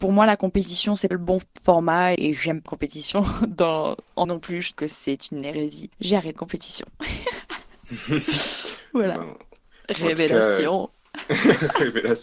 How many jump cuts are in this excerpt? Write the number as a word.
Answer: seven